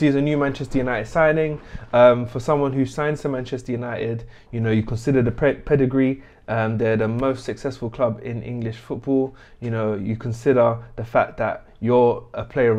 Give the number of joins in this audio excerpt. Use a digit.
0